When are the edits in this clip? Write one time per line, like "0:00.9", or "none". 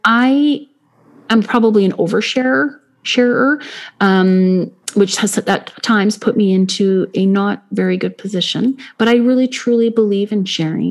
0:04.8

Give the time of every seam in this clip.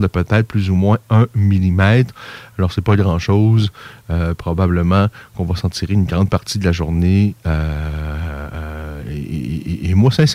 none

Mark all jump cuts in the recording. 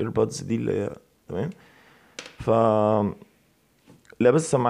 none

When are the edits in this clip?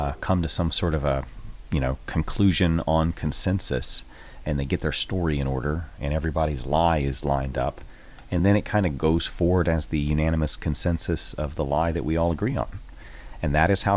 none

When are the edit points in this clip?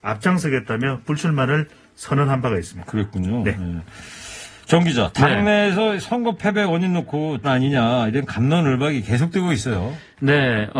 0:07.4

